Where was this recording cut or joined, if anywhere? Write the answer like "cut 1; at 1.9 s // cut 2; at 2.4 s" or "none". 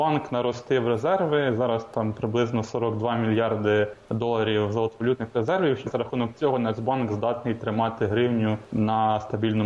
none